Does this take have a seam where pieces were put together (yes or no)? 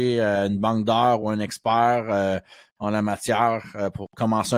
no